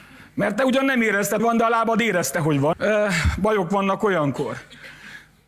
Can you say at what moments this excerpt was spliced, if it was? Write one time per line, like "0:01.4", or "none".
0:01.4
0:02.7